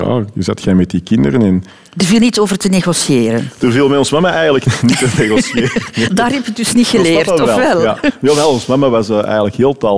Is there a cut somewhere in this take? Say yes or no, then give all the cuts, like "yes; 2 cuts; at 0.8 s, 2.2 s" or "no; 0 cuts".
no; 0 cuts